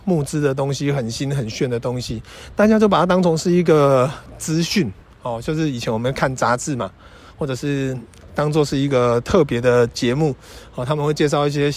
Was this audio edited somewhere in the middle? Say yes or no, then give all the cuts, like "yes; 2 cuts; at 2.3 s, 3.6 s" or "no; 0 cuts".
no; 0 cuts